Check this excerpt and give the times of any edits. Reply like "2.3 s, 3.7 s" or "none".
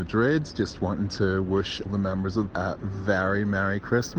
1.9 s, 2.5 s